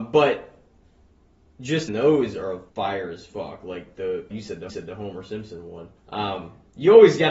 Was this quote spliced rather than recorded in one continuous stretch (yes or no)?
yes